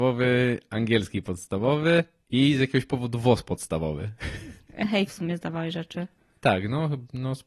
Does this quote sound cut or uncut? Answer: cut